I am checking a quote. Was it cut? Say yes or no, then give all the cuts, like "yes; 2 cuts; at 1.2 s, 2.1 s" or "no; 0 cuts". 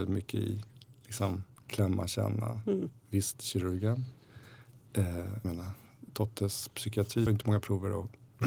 yes; 2 cuts; at 5.4 s, 7.3 s